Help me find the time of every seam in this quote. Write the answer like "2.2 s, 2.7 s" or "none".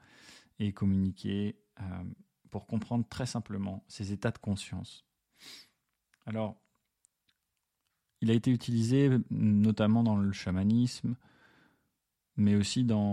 none